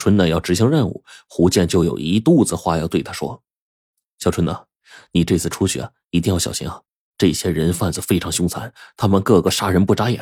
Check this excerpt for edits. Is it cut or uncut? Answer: uncut